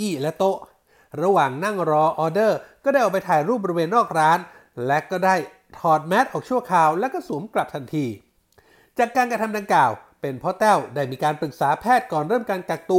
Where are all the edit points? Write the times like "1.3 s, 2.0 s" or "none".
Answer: none